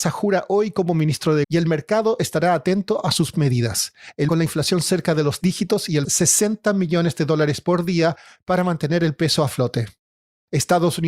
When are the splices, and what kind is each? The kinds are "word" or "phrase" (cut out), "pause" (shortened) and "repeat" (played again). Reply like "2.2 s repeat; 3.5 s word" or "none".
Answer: 1.4 s word; 3.3 s word; 4.3 s phrase; 5.4 s word; 6.0 s phrase